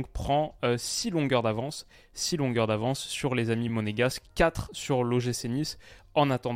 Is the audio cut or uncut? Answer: uncut